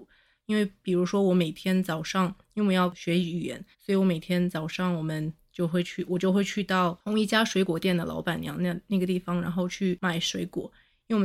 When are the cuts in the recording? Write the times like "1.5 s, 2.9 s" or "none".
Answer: 3.7 s